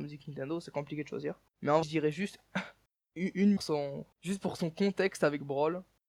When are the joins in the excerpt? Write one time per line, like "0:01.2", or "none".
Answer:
0:01.5
0:01.8
0:03.6
0:04.1